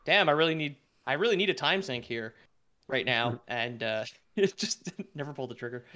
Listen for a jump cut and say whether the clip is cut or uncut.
uncut